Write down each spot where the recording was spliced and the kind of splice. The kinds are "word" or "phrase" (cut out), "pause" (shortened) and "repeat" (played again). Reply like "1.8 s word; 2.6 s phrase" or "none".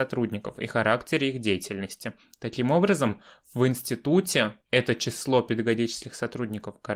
4.6 s pause